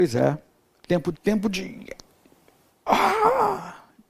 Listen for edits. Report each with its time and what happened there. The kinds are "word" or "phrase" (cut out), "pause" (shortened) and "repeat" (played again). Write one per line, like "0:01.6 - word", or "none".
0:01.1 - word